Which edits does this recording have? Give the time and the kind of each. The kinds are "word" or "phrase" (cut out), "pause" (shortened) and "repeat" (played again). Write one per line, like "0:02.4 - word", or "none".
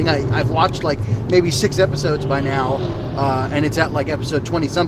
none